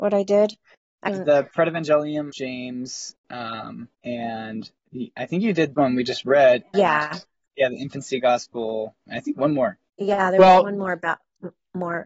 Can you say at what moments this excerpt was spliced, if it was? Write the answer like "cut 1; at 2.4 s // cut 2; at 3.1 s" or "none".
cut 1; at 1.1 s // cut 2; at 2.3 s // cut 3; at 3.9 s // cut 4; at 5.7 s // cut 5; at 6.7 s // cut 6; at 9.1 s // cut 7; at 9.9 s